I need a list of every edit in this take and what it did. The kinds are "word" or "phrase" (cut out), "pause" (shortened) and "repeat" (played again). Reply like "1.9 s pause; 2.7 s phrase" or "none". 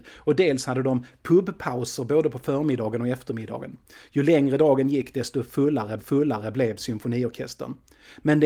6.0 s repeat